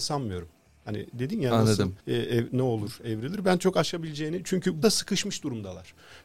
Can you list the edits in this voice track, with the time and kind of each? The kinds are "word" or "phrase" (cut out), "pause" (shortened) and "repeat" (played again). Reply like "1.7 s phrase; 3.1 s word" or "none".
2.0 s pause; 4.8 s word